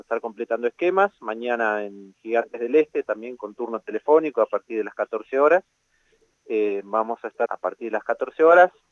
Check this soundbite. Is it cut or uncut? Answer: cut